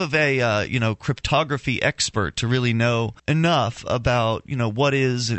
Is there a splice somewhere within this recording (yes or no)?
yes